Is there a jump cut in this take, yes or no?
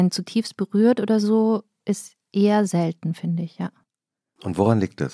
no